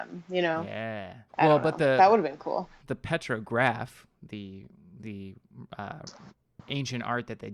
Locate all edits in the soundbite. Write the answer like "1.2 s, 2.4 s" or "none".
1.3 s